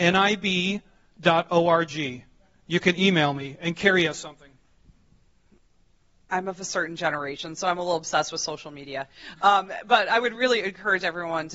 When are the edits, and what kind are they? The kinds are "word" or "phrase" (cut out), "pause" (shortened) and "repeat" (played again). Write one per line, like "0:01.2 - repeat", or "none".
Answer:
none